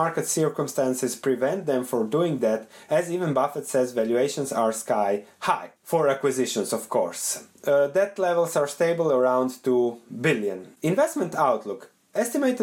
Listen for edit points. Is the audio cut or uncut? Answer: cut